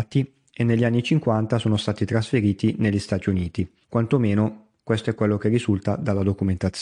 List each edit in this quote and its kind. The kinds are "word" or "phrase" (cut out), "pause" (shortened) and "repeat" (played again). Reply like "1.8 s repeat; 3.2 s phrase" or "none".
3.8 s pause

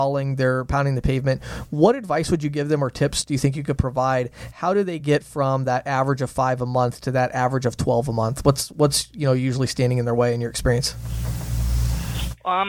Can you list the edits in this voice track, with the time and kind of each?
none

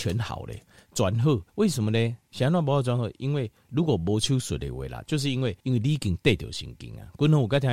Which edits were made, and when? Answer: 1.5 s pause; 5.6 s pause

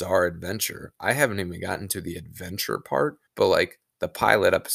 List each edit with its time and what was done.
3.3 s pause

